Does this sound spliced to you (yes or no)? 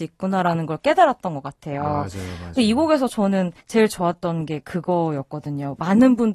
yes